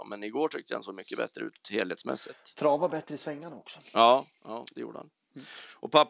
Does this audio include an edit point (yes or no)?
no